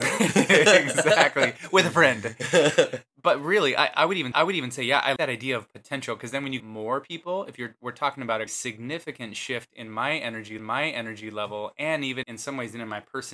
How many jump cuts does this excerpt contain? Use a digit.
6